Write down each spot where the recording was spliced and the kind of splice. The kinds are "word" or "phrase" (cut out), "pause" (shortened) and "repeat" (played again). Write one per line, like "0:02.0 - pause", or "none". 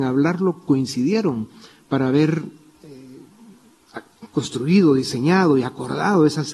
none